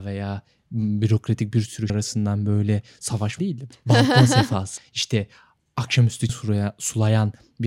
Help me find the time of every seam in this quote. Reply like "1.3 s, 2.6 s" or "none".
1.9 s, 3.4 s, 3.7 s, 4.8 s, 6.3 s